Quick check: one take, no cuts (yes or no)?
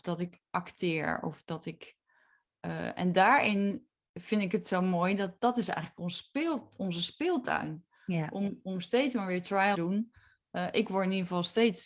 no